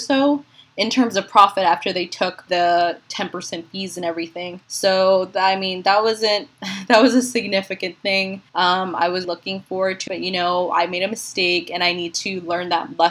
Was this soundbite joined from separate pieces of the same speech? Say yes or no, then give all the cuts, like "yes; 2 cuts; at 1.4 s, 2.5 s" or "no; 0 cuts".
yes; 5 cuts; at 2.5 s, 4.6 s, 8.5 s, 9.2 s, 10.1 s